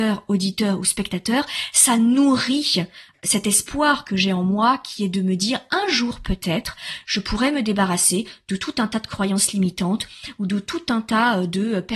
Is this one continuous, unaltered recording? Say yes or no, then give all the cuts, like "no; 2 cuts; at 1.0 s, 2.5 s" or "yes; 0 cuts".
yes; 0 cuts